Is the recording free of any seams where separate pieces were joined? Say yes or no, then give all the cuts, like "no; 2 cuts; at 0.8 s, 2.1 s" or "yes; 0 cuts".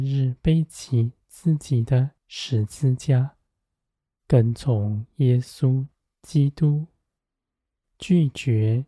no; 1 cut; at 2.2 s